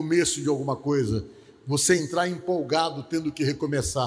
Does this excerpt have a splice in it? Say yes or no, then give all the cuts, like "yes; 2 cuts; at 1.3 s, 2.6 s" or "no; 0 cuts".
no; 0 cuts